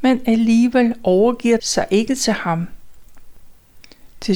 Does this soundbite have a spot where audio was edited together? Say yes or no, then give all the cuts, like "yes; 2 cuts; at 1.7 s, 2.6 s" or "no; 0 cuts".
yes; 1 cut; at 1.6 s